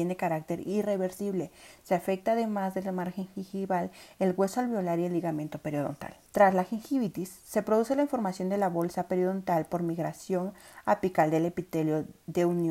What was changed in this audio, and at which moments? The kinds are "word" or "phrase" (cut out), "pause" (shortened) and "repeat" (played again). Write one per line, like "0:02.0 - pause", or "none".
0:06.3 - pause